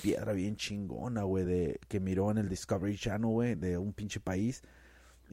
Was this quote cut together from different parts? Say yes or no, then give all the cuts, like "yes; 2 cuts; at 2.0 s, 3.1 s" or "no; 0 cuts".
no; 0 cuts